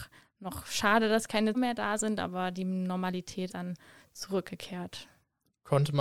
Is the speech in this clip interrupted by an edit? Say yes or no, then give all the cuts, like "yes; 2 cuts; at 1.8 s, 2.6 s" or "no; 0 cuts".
yes; 2 cuts; at 1.5 s, 3.5 s